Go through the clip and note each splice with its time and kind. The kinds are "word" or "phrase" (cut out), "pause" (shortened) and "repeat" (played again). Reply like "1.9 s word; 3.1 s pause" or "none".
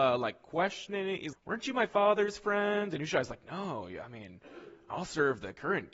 1.3 s word